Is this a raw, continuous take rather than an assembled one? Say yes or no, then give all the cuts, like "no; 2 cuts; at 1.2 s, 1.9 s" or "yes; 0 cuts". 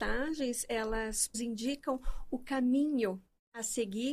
no; 1 cut; at 1.3 s